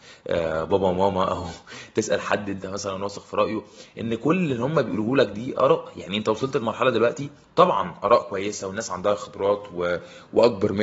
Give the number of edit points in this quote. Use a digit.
0